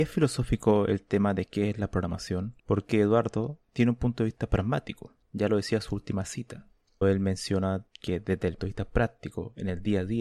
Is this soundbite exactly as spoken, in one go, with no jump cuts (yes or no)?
no